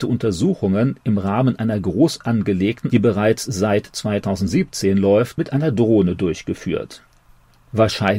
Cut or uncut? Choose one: cut